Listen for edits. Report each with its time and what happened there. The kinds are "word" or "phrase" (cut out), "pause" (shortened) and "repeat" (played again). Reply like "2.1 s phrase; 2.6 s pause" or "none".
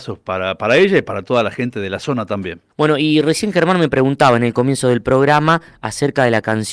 2.7 s pause